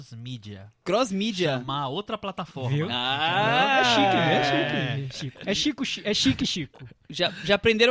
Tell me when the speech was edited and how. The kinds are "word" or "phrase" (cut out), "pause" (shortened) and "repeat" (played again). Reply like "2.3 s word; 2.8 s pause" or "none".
none